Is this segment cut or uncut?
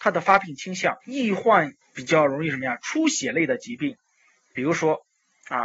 cut